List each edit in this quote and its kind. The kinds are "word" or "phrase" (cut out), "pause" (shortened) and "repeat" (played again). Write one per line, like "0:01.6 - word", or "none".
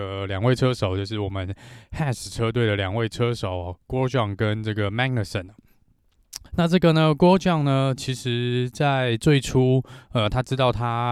0:06.5 - pause